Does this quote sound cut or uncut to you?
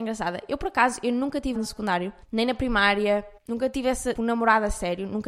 cut